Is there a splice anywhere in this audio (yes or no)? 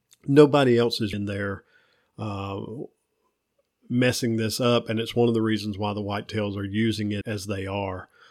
yes